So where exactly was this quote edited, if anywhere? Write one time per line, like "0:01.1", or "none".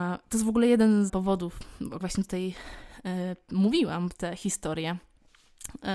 0:01.1
0:02.0
0:04.2